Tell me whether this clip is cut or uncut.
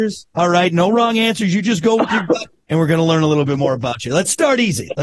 uncut